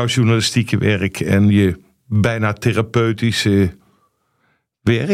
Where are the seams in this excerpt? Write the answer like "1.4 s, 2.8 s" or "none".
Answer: none